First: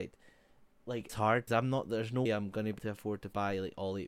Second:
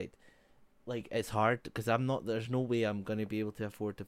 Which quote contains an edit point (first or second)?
first